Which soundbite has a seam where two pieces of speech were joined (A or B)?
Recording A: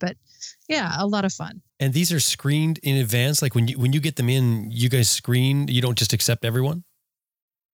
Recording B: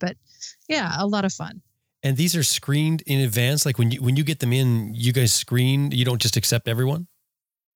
A